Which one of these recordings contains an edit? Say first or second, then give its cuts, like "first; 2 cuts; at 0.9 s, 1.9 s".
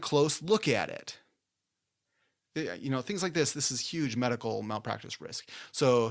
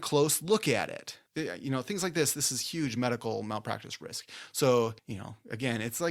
second; 2 cuts; at 1.3 s, 5.0 s